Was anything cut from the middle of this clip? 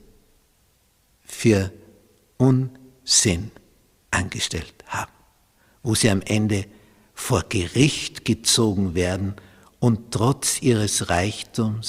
no; 0 cuts

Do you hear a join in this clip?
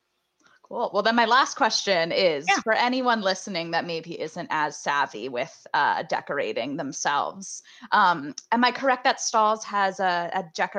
no; 0 cuts

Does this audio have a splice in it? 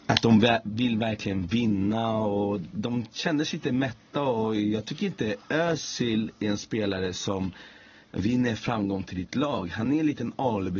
no; 0 cuts

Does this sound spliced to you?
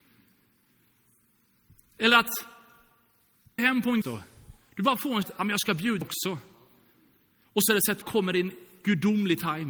yes; 6 cuts; at 3.6 s, 4.0 s, 5.2 s, 6.0 s, 7.7 s, 8.0 s

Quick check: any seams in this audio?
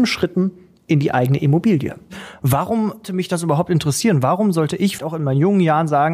yes; 2 cuts; at 3.0 s, 5.0 s

